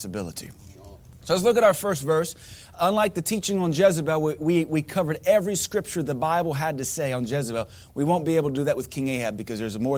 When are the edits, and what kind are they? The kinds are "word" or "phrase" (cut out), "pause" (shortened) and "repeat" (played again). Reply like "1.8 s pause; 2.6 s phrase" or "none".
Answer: none